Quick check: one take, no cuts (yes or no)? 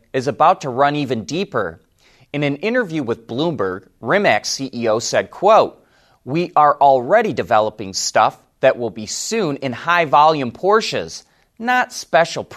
yes